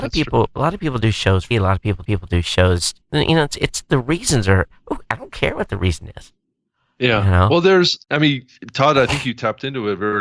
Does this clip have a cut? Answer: yes; 4 cuts; at 1.5 s, 2.0 s, 3.0 s, 8.0 s

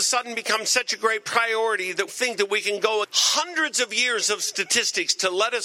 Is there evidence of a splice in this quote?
yes; 2 cuts; at 2.1 s, 3.0 s

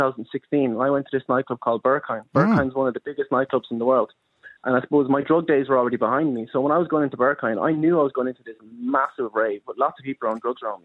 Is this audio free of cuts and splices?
yes; 0 cuts

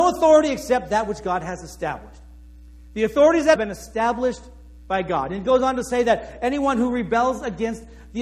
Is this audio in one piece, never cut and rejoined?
no; 1 cut; at 3.5 s

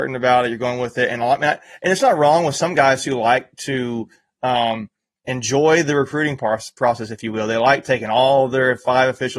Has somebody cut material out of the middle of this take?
no; 0 cuts

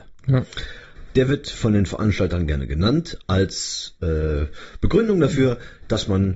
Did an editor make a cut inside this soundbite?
no; 0 cuts

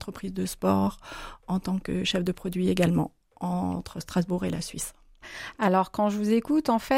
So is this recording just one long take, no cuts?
yes; 0 cuts

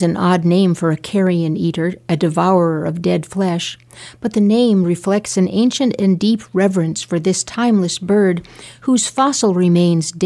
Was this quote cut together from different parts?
no; 0 cuts

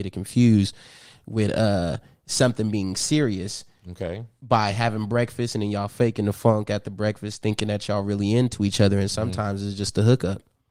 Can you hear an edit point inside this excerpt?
no; 0 cuts

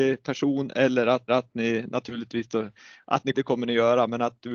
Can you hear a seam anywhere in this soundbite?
yes; 2 cuts; at 1.3 s, 3.3 s

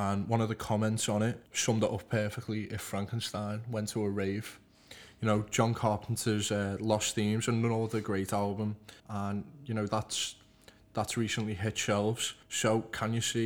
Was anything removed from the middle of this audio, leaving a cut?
yes; 3 cuts; at 1.5 s, 9.0 s, 12.4 s

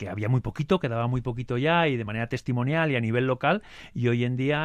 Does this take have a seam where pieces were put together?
no; 0 cuts

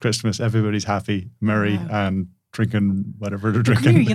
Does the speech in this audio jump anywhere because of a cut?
no; 0 cuts

